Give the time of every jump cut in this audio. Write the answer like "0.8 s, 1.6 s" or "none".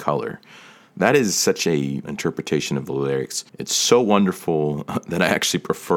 2.0 s, 3.5 s